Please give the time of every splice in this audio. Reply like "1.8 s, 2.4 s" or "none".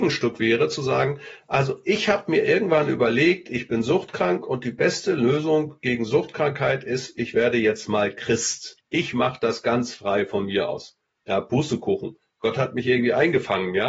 8.8 s